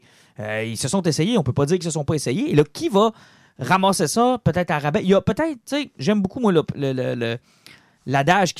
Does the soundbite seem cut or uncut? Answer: uncut